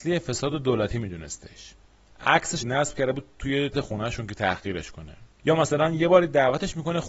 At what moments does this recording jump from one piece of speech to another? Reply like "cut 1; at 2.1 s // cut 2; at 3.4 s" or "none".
cut 1; at 2.6 s // cut 2; at 3.7 s